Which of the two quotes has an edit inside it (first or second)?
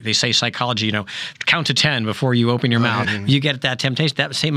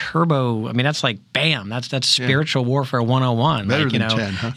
first